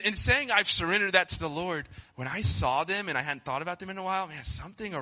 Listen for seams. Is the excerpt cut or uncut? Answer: uncut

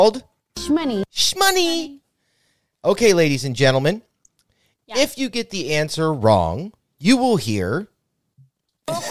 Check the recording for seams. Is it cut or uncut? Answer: uncut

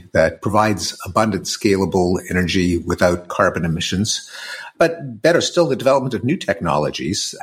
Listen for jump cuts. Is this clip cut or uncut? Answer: uncut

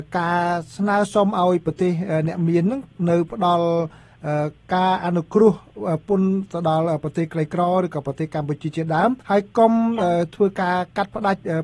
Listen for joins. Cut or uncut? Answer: cut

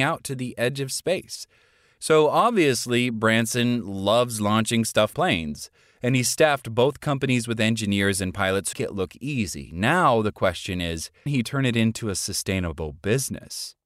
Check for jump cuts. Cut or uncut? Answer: cut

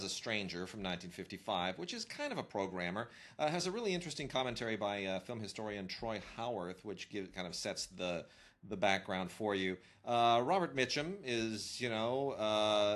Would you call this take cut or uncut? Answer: uncut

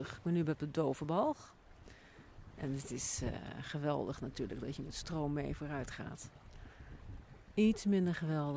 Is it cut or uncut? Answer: uncut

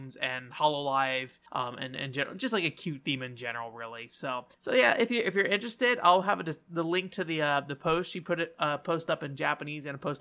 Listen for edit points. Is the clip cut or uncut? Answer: cut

